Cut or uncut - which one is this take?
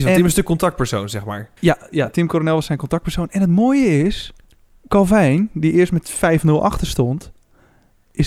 cut